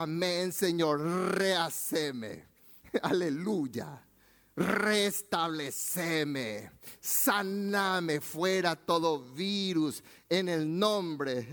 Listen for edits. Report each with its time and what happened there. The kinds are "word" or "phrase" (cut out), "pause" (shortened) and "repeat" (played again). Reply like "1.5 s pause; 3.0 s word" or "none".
none